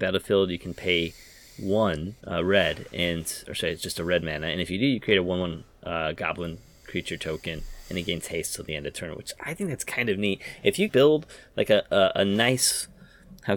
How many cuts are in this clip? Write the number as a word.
two